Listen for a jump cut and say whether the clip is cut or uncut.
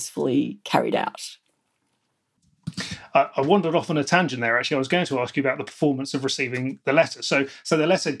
uncut